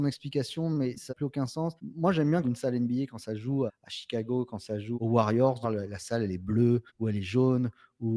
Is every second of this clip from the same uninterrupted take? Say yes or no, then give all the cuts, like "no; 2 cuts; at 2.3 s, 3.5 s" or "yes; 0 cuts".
no; 7 cuts; at 1.1 s, 1.8 s, 2.4 s, 3.7 s, 4.9 s, 5.6 s, 6.9 s